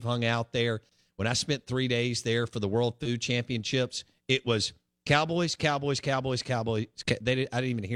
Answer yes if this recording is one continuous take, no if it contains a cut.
yes